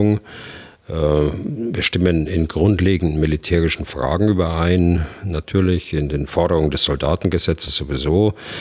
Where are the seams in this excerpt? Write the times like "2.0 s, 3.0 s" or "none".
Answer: none